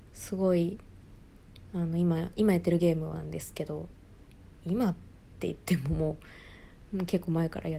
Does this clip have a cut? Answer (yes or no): yes